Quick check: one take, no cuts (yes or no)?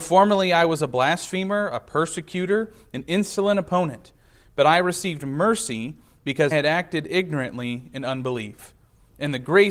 no